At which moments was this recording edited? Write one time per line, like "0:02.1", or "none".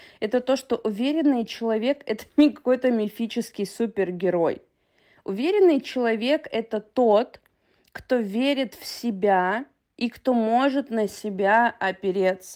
none